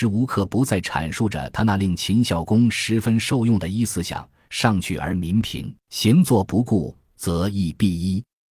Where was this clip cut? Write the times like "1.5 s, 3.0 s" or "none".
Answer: 5.8 s